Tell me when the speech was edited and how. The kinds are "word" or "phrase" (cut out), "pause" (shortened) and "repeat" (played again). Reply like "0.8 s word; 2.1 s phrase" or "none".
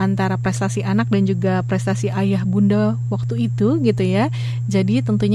none